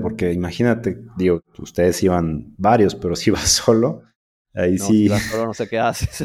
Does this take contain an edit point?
no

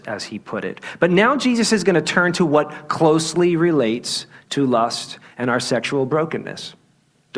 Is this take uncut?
yes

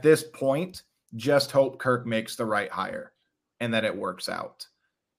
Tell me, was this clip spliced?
no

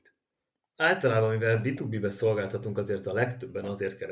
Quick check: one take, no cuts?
yes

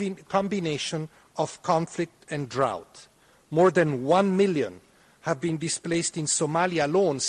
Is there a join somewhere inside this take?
no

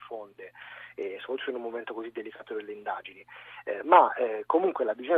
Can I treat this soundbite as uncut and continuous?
yes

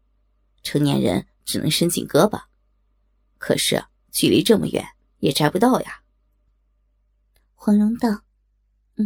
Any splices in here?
no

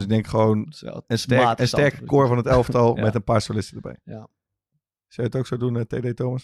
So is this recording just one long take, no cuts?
no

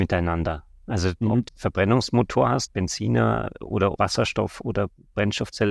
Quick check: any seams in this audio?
yes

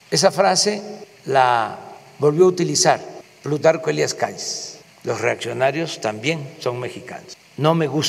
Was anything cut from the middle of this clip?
no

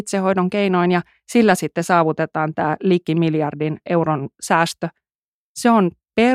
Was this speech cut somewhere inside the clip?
no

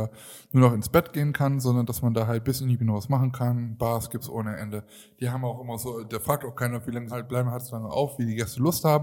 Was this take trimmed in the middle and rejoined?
yes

